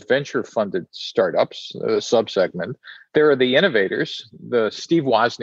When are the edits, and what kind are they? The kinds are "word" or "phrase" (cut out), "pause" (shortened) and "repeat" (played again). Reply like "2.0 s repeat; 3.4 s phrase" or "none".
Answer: 2.0 s word